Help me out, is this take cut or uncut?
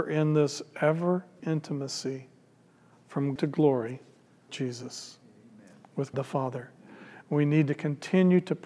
cut